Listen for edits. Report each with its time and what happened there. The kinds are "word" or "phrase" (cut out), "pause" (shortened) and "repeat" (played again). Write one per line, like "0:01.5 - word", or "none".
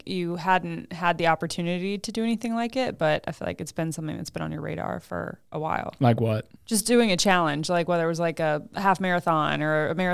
0:06.6 - pause